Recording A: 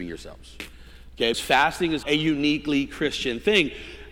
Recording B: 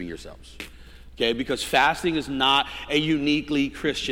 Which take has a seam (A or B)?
A